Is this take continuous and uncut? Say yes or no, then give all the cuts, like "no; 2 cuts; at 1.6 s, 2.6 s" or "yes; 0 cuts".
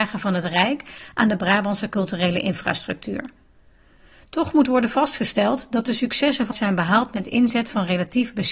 no; 1 cut; at 6.5 s